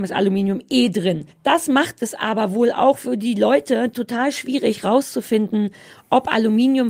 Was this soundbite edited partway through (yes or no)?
yes